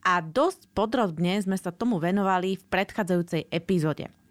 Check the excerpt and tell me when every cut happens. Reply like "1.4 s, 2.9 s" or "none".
none